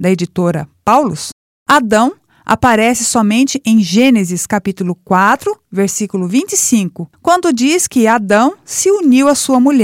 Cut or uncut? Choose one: uncut